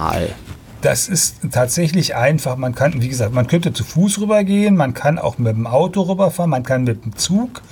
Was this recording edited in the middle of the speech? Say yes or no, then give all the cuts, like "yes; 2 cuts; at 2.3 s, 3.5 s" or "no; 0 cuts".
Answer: no; 0 cuts